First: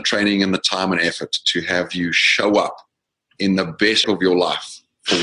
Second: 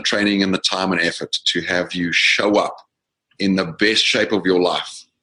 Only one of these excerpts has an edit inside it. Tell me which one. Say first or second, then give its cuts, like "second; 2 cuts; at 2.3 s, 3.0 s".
first; 1 cut; at 4.0 s